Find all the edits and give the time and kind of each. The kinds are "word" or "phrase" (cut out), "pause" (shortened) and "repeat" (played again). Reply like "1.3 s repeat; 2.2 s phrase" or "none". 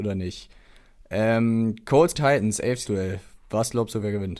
2.1 s word; 2.8 s word